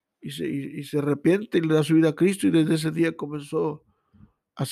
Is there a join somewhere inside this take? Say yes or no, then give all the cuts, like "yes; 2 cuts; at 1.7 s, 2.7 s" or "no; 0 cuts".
no; 0 cuts